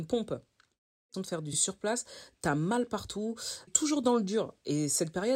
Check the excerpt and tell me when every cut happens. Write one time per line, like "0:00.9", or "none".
0:01.1
0:01.5
0:03.7